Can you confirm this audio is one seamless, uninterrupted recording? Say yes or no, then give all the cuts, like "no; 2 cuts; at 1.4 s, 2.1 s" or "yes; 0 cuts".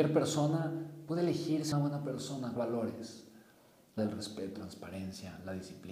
no; 4 cuts; at 1.7 s, 2.6 s, 4.0 s, 4.5 s